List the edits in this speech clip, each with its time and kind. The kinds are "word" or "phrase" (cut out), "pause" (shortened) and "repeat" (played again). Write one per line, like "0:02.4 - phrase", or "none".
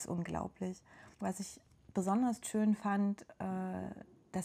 0:01.1 - pause